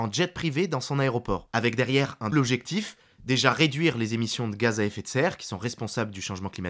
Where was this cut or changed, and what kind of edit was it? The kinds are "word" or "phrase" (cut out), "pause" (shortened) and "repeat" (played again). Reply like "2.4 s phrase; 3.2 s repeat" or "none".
2.3 s word